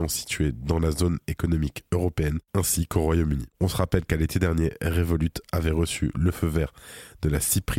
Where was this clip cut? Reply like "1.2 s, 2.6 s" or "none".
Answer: 2.5 s